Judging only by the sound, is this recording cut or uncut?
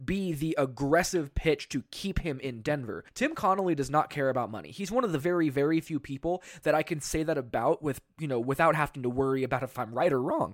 cut